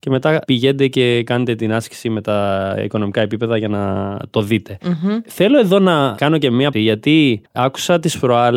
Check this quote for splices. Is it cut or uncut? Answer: cut